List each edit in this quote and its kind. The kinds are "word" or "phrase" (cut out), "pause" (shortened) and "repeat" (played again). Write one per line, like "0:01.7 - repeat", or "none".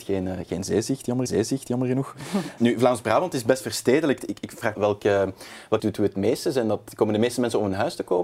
0:01.3 - repeat
0:02.6 - word
0:04.7 - phrase
0:05.8 - phrase